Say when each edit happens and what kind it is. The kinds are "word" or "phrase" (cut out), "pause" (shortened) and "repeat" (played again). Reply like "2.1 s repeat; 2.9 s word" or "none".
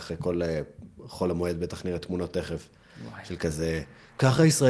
none